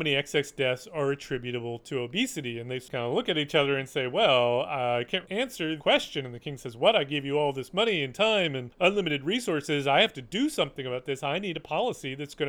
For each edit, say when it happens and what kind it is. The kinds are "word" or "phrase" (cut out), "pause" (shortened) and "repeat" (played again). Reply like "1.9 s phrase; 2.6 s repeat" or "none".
5.2 s word; 5.8 s word